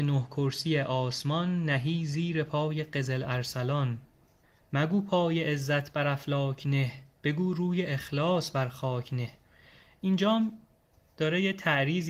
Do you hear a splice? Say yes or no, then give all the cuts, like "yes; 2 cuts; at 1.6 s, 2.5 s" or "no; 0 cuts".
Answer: no; 0 cuts